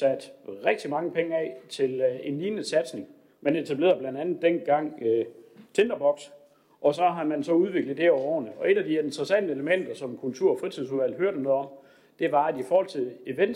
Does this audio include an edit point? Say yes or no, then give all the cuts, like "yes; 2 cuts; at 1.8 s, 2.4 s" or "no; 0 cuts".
no; 0 cuts